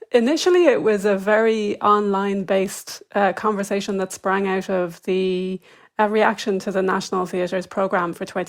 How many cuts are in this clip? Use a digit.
0